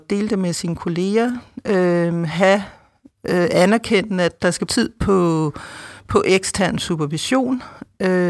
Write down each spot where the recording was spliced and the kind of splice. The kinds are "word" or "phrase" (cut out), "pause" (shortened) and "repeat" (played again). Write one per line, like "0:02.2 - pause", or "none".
0:04.7 - word

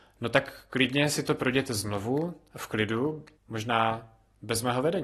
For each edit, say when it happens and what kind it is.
0:03.4 - pause

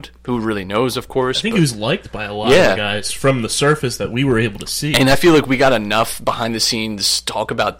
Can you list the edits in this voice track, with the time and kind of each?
none

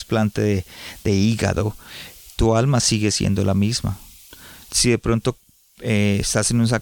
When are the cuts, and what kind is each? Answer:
none

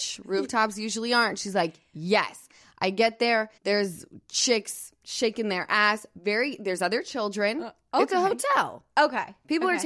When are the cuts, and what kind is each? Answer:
0:03.6 - pause

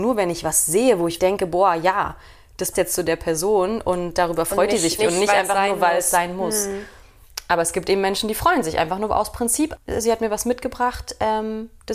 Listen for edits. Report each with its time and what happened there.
0:01.2 - word
0:02.7 - word
0:05.0 - word
0:09.8 - word

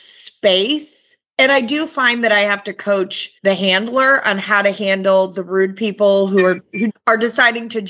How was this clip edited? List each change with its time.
0:03.4 - pause
0:06.9 - word

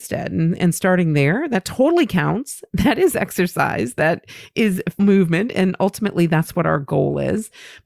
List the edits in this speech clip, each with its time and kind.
0:05.0 - word

